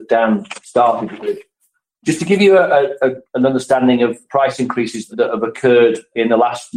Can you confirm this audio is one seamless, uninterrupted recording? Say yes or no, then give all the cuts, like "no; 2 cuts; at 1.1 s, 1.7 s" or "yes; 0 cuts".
yes; 0 cuts